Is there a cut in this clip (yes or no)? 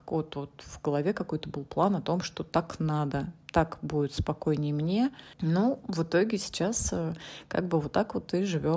no